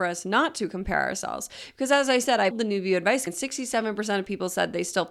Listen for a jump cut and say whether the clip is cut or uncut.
cut